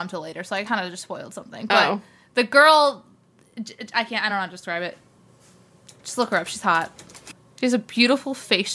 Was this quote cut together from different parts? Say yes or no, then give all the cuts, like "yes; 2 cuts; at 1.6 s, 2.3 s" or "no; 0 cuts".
no; 0 cuts